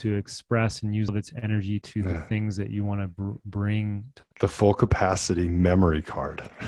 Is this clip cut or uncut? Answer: cut